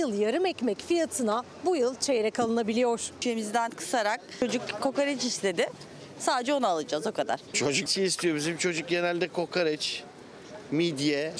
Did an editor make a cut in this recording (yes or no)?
yes